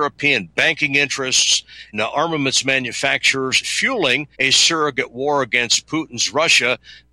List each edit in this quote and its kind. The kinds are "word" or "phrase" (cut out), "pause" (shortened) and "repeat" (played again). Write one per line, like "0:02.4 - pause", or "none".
0:01.9 - word
0:03.6 - word
0:04.3 - pause